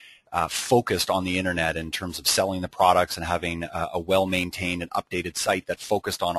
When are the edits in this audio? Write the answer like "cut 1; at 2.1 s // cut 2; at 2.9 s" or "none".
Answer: none